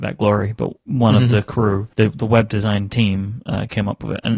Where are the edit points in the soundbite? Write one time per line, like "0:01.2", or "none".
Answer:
0:01.9